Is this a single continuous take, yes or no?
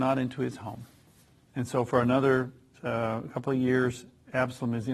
yes